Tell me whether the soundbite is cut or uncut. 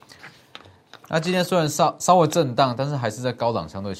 cut